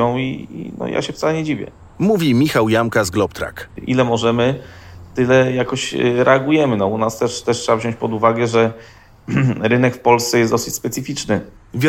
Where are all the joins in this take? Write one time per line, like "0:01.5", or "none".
none